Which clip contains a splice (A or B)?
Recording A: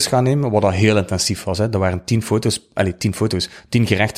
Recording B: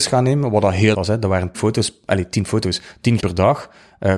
B